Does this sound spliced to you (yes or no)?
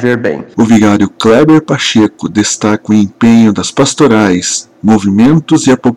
no